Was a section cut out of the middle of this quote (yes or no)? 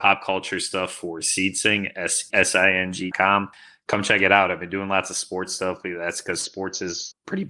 yes